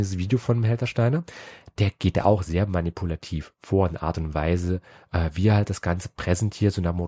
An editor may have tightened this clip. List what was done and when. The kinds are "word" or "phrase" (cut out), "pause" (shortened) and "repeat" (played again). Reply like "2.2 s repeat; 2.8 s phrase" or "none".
none